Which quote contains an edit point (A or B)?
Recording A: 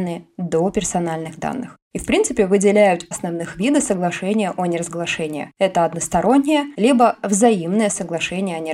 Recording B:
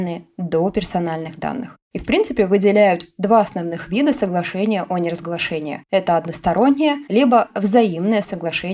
A